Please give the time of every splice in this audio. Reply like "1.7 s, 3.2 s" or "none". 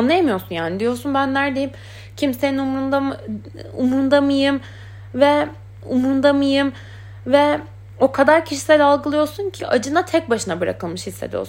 5.8 s, 9.6 s